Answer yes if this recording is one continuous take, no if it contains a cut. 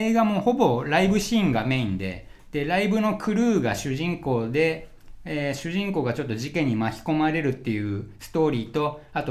yes